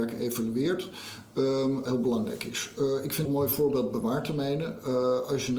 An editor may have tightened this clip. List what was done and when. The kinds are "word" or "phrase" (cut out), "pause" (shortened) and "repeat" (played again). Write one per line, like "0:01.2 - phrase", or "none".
0:01.9 - word
0:03.3 - word